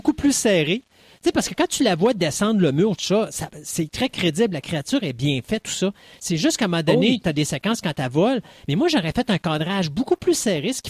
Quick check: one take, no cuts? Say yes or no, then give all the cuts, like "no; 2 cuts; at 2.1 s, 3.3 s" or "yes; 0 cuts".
yes; 0 cuts